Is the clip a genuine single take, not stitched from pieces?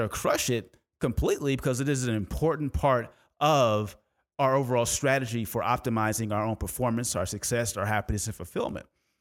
yes; 0 cuts

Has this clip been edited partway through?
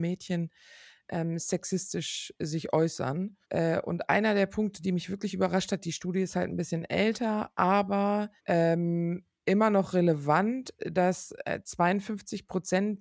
yes; 2 cuts; at 3.4 s, 8.4 s

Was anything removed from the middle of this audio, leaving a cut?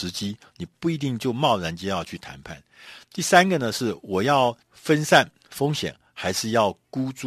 yes; 1 cut; at 4.6 s

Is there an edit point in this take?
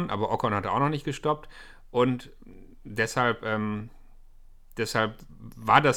no; 0 cuts

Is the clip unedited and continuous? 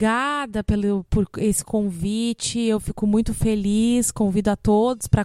yes; 0 cuts

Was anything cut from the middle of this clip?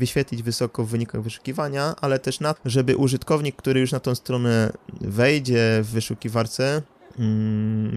yes; 1 cut; at 2.6 s

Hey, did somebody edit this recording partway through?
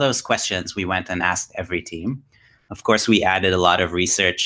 no; 0 cuts

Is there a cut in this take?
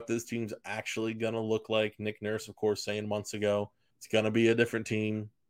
yes; 1 cut; at 3.9 s

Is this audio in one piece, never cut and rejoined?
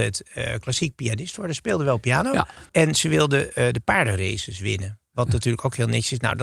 no; 1 cut; at 2.7 s

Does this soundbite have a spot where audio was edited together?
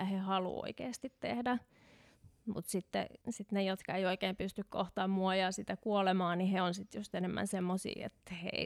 yes; 1 cut; at 3.2 s

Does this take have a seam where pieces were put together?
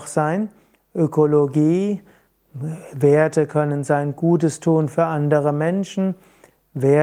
no; 0 cuts

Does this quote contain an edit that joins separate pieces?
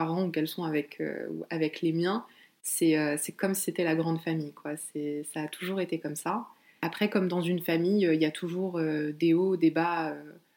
no; 0 cuts

